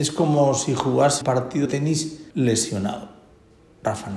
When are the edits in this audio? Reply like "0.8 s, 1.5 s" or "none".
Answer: 1.2 s, 1.6 s, 2.3 s